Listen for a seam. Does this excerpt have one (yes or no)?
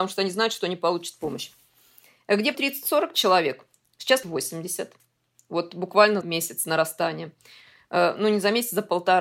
yes